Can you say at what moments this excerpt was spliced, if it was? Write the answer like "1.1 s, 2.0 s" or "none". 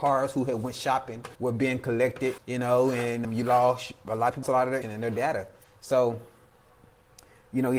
1.3 s, 2.4 s, 3.2 s, 4.4 s, 4.8 s